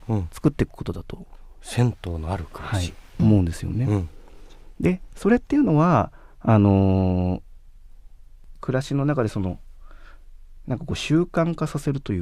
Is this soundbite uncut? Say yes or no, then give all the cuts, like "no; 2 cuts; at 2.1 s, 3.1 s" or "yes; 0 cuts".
no; 1 cut; at 3.2 s